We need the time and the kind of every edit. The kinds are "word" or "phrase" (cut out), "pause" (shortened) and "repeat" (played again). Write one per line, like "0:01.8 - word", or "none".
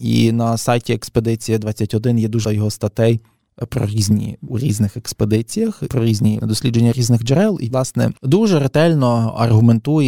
0:02.4 - word
0:04.5 - phrase
0:05.9 - word
0:06.4 - word
0:07.7 - word
0:08.2 - pause